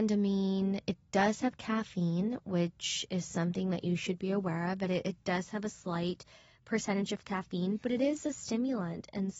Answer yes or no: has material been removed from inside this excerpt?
no